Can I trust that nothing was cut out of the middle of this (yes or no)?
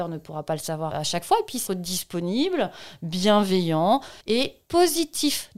no